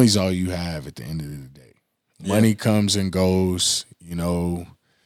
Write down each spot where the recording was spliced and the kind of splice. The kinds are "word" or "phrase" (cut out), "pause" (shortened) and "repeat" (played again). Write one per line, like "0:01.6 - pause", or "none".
none

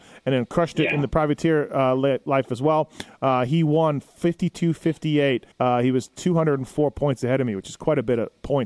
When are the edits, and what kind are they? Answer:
0:05.5 - pause

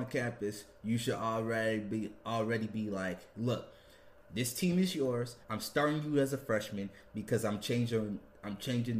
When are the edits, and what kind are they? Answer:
0:05.4 - pause

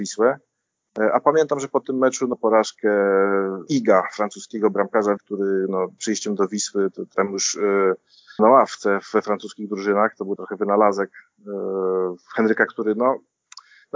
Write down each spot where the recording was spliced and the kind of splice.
0:02.3 - word
0:03.7 - word
0:05.2 - word
0:06.0 - word
0:07.1 - word
0:08.4 - word
0:10.4 - word
0:12.7 - word

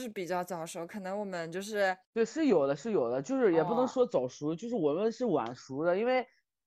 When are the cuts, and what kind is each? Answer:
0:02.0 - pause

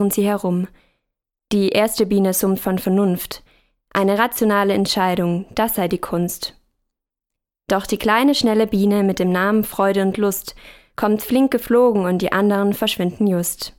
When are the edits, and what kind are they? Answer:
none

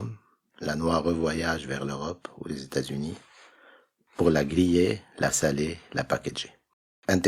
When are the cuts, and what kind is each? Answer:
none

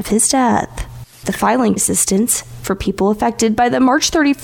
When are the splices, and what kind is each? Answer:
0:01.1 - pause
0:01.8 - phrase

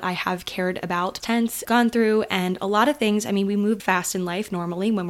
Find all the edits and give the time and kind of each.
0:01.2 - word
0:01.6 - phrase
0:03.8 - word

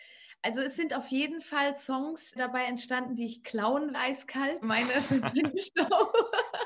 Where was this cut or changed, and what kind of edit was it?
0:02.4 - word
0:03.9 - word
0:04.6 - word

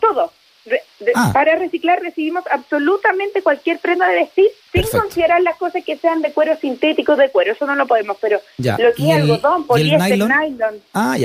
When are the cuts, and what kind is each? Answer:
0:04.6 - pause

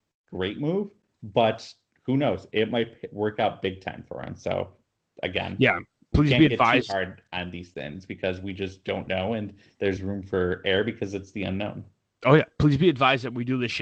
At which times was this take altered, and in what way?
0:10.0 - word

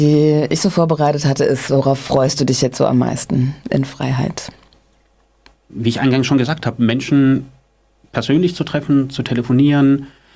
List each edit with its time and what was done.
none

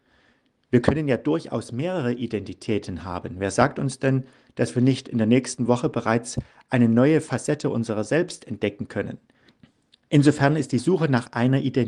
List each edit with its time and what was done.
none

